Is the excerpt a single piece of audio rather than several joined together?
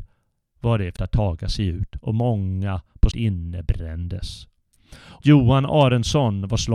no; 3 cuts; at 1.0 s, 3.1 s, 5.2 s

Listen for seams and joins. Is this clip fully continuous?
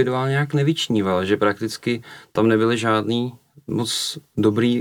yes; 0 cuts

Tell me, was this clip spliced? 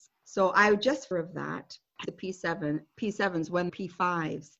yes; 3 cuts; at 1.1 s, 2.0 s, 3.7 s

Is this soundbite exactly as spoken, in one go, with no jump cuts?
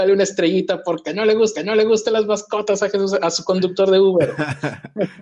no; 1 cut; at 1.6 s

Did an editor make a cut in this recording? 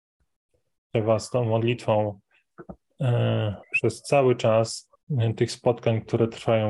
yes; 3 cuts; at 0.9 s, 3.6 s, 5.0 s

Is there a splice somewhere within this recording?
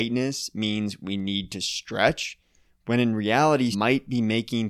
yes; 1 cut; at 3.7 s

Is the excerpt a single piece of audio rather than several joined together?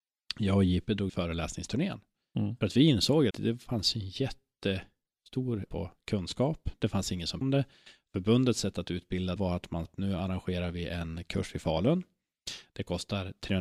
no; 6 cuts; at 1.1 s, 3.3 s, 5.7 s, 7.4 s, 9.4 s, 9.8 s

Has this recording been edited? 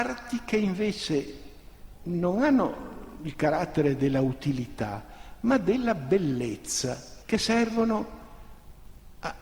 yes; 1 cut; at 7.2 s

